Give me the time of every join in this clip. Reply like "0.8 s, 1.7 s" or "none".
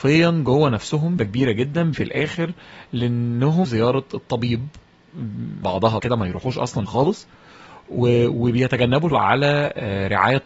1.2 s, 1.9 s, 3.6 s, 5.6 s, 6.0 s, 6.9 s, 9.1 s